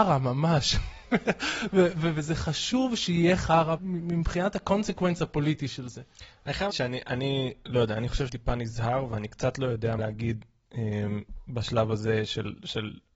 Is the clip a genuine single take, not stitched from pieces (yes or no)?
no